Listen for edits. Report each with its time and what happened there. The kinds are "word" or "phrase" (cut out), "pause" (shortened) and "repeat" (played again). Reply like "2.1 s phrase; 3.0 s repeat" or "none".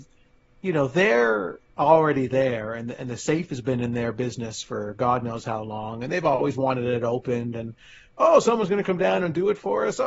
none

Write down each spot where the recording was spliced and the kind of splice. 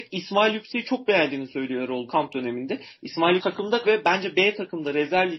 2.1 s word; 3.4 s word; 3.8 s word

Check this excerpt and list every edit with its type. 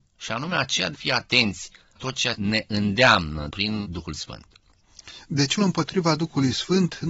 0.9 s word; 2.0 s word; 2.4 s word; 3.5 s word; 3.8 s word; 5.6 s word

